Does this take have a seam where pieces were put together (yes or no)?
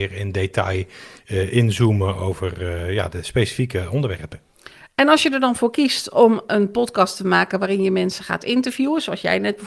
no